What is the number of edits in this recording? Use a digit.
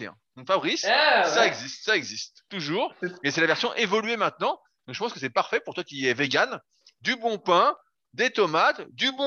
0